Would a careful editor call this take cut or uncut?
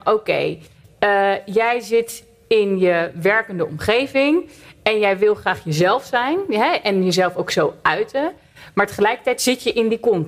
uncut